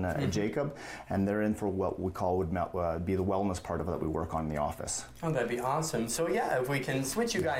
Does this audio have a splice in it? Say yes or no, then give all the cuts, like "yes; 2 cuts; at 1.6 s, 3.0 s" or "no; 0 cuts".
no; 0 cuts